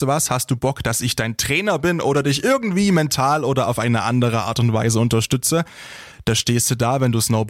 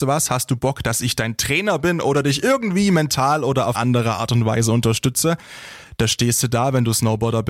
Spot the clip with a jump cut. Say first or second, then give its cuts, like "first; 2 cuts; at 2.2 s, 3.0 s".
second; 1 cut; at 3.7 s